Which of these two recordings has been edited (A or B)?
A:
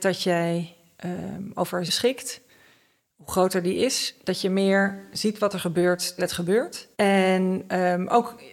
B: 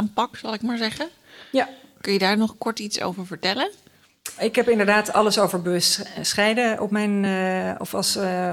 A